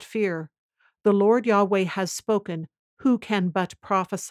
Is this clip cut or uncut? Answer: uncut